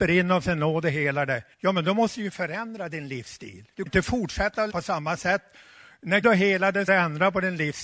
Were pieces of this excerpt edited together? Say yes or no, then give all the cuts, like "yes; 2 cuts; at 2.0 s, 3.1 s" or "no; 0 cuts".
yes; 5 cuts; at 1.5 s, 3.9 s, 4.7 s, 6.2 s, 6.9 s